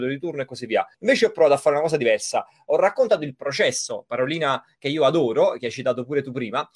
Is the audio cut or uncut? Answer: cut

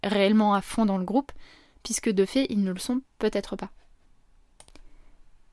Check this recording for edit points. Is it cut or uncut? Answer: uncut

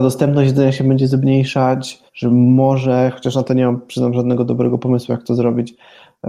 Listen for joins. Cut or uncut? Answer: cut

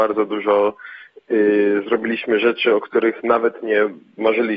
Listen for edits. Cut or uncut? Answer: uncut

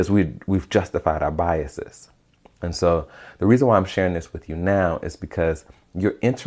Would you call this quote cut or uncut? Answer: uncut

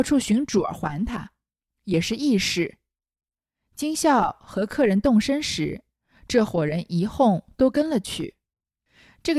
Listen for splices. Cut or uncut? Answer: uncut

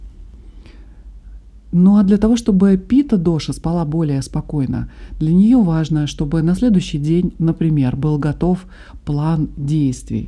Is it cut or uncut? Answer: uncut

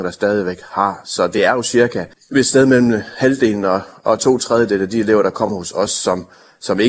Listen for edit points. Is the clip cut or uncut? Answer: uncut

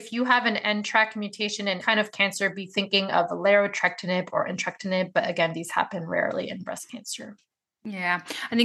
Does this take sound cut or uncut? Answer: cut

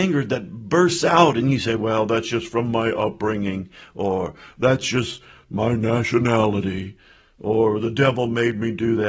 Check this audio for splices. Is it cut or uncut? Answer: uncut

